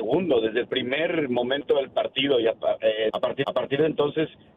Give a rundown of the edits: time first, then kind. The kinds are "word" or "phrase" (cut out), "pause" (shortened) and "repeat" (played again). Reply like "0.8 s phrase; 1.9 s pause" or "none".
3.1 s word; 3.4 s repeat